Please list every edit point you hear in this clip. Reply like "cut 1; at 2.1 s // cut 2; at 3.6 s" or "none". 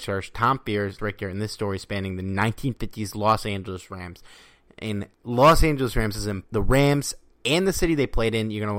cut 1; at 1.0 s // cut 2; at 5.1 s // cut 3; at 6.4 s